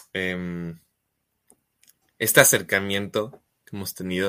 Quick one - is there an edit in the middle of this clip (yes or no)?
no